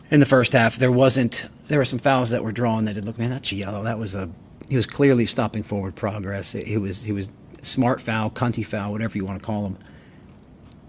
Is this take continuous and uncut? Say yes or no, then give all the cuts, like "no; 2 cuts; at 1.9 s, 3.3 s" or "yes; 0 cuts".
no; 3 cuts; at 1.6 s, 3.2 s, 3.5 s